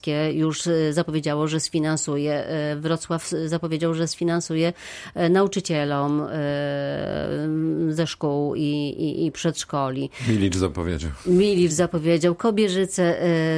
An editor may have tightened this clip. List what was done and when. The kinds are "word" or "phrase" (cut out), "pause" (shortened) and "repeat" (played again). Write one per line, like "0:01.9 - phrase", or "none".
none